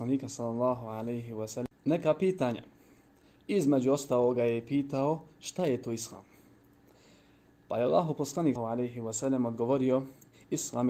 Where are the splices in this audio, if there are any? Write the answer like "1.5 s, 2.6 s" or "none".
8.6 s